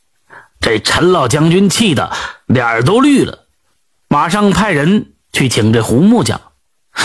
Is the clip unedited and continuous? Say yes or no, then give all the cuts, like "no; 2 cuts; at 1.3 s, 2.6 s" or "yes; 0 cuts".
yes; 0 cuts